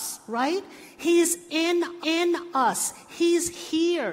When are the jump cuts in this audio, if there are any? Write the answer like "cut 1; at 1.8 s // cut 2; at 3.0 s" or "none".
cut 1; at 2.0 s

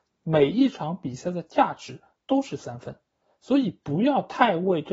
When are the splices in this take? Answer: none

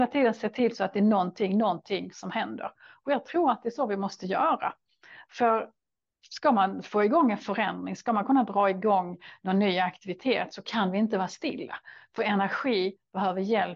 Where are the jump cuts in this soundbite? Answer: none

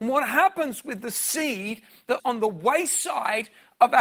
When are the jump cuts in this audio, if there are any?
cut 1; at 2.2 s

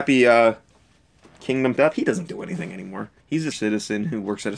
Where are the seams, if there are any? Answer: cut 1; at 1.8 s // cut 2; at 2.3 s // cut 3; at 3.2 s // cut 4; at 3.5 s

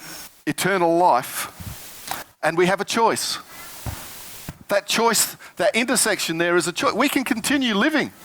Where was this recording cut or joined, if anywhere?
cut 1; at 5.5 s

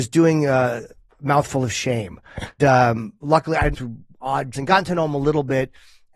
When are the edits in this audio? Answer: cut 1; at 2.6 s // cut 2; at 3.7 s // cut 3; at 4.5 s

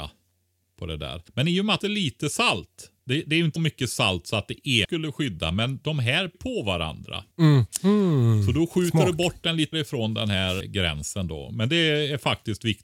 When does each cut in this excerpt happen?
cut 1; at 1.3 s // cut 2; at 1.8 s // cut 3; at 3.0 s // cut 4; at 3.6 s // cut 5; at 4.8 s // cut 6; at 6.3 s // cut 7; at 7.3 s // cut 8; at 9.7 s // cut 9; at 10.6 s

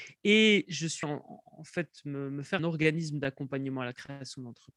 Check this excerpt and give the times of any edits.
cut 1; at 1.0 s // cut 2; at 2.6 s

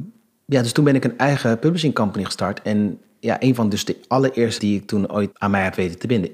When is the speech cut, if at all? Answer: cut 1; at 4.6 s // cut 2; at 5.3 s

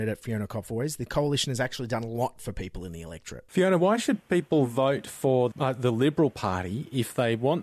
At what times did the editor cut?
cut 1; at 5.5 s

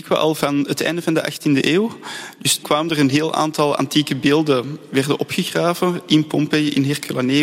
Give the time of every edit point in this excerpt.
cut 1; at 2.6 s

